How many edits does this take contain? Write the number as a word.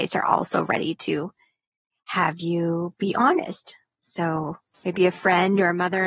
zero